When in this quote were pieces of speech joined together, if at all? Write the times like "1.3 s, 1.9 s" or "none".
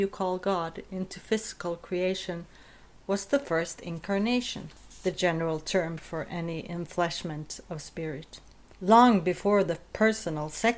none

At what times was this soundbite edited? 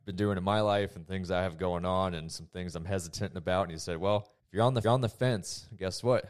4.4 s, 4.8 s

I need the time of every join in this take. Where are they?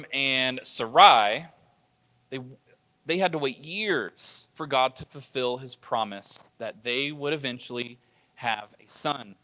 none

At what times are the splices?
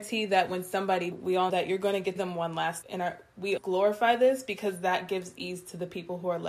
1.1 s, 1.5 s, 2.2 s, 2.8 s, 3.6 s

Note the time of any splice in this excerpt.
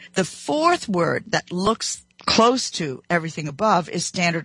2.1 s

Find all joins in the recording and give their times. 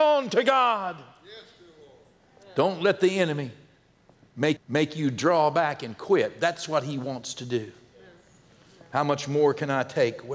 4.6 s

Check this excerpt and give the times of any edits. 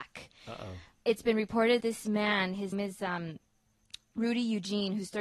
1.8 s, 2.7 s

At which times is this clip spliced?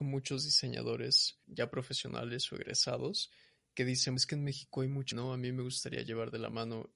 1.4 s, 4.2 s, 5.1 s

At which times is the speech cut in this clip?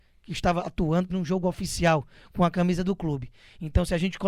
1.1 s

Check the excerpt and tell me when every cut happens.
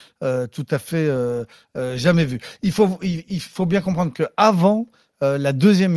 none

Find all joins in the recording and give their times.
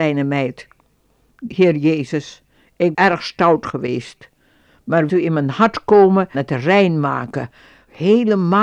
2.9 s, 5.1 s, 6.3 s

